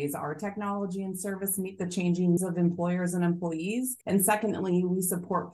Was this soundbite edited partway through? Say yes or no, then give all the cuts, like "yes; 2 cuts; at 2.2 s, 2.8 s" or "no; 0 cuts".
yes; 2 cuts; at 2.4 s, 4.0 s